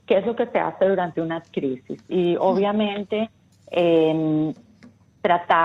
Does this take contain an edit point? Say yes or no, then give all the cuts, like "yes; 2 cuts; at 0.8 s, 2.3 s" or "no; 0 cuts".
no; 0 cuts